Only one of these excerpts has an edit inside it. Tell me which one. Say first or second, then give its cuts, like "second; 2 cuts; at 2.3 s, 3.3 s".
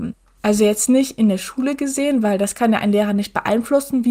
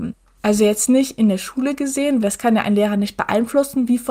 second; 1 cut; at 2.2 s